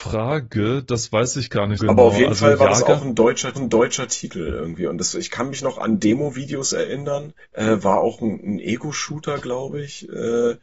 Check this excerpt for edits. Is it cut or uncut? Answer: cut